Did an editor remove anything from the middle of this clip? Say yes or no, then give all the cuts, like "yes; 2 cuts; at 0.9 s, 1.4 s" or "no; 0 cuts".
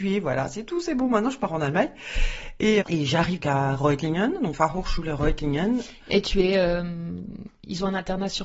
yes; 4 cuts; at 2.8 s, 3.4 s, 4.5 s, 6.1 s